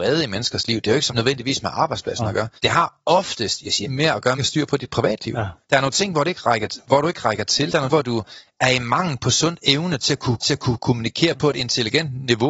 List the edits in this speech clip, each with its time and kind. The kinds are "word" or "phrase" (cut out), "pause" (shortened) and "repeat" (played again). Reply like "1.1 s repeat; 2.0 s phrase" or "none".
1.1 s word; 2.6 s pause; 3.8 s phrase; 4.4 s phrase; 5.6 s pause; 7.9 s word; 10.4 s repeat